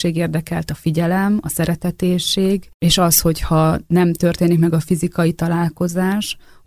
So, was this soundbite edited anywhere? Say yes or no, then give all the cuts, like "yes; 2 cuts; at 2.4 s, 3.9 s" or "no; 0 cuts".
no; 0 cuts